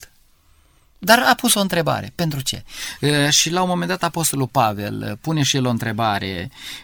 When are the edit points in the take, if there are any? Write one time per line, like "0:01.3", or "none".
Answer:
none